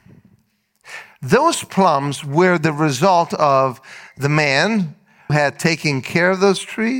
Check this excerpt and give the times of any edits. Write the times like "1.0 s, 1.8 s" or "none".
5.3 s